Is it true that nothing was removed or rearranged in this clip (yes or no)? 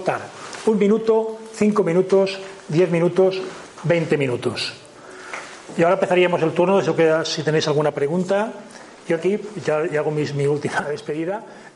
no